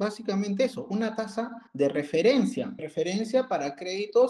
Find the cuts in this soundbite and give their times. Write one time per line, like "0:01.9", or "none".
0:01.7
0:02.8